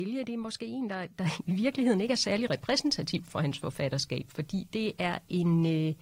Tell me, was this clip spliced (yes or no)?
no